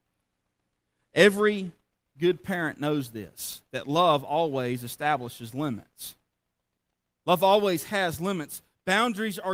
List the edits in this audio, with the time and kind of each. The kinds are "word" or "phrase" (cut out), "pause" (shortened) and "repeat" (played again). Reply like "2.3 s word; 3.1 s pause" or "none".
none